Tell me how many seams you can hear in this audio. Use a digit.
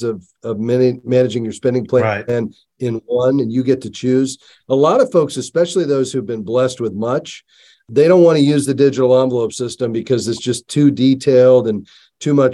0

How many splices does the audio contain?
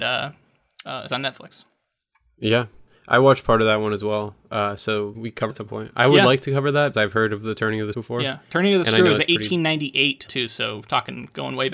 6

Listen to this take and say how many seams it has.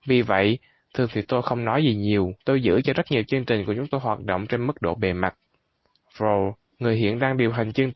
2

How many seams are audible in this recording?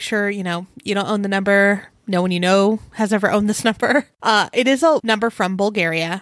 0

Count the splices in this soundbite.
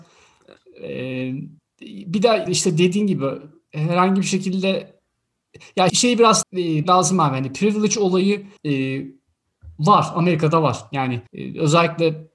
7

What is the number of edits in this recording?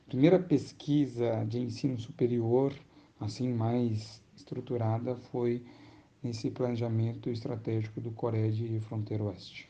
0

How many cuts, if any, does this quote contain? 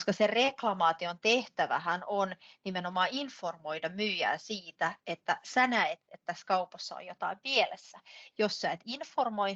0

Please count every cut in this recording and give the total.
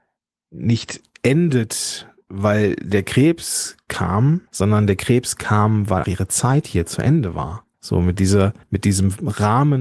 4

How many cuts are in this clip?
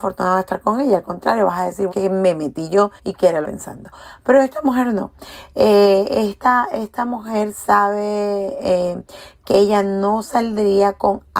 3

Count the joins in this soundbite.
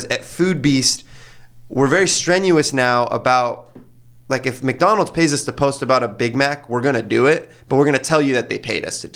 0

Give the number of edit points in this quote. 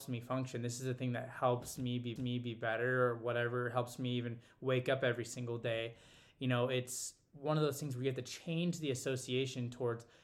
1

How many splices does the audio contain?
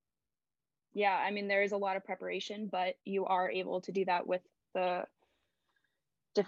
1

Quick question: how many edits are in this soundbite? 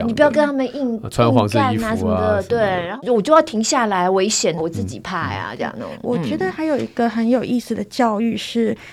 1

